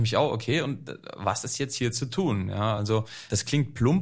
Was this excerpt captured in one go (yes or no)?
yes